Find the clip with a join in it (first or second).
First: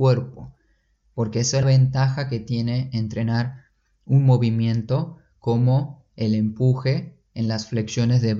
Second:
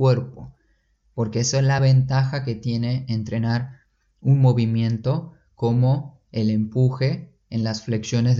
first